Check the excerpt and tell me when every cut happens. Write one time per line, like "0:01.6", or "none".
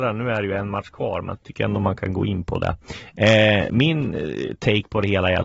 0:01.4

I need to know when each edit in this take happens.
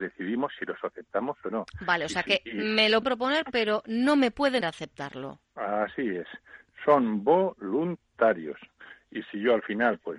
0:03.0
0:04.6

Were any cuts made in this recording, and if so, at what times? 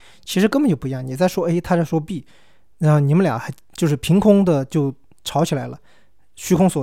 none

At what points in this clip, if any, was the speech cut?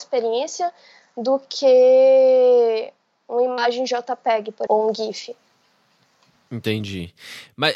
0:04.7

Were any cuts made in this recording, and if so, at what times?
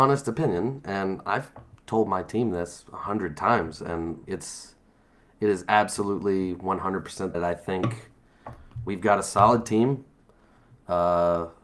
0:01.7
0:04.2
0:07.3

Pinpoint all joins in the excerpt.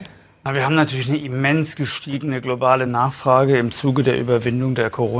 none

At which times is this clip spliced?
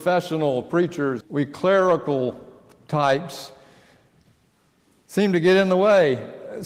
0:01.2

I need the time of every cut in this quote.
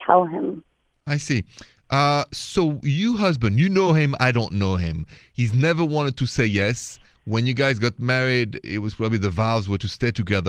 none

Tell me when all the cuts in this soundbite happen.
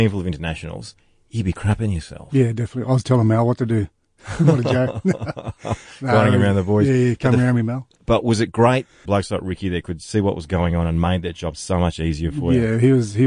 0:01.0
0:09.1

